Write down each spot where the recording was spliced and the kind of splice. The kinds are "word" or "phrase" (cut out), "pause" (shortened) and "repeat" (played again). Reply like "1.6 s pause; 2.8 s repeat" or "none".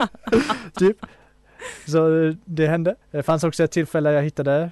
3.0 s pause